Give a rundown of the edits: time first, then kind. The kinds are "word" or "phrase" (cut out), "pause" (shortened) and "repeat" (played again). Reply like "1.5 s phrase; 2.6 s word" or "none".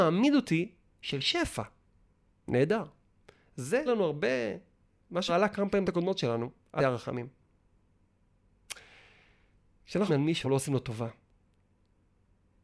0.9 s word; 3.9 s word; 5.3 s word; 5.8 s word; 6.8 s word; 10.1 s word; 10.4 s word